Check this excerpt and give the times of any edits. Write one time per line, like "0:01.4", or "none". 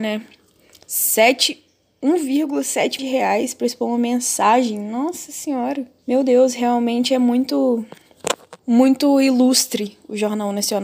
0:03.0
0:06.0
0:08.6